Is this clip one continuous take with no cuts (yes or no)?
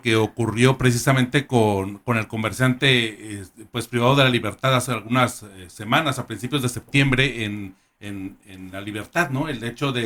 yes